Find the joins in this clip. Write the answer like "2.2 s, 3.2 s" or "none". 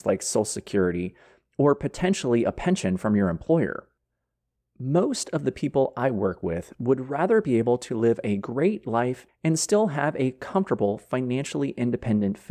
9.3 s